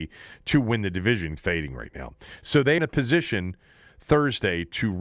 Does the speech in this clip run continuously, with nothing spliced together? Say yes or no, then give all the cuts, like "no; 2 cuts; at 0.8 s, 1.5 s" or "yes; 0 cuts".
no; 2 cuts; at 1.4 s, 2.8 s